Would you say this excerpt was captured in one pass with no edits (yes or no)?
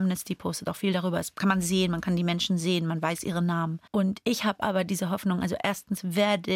no